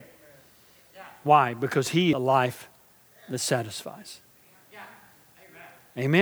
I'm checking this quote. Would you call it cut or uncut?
cut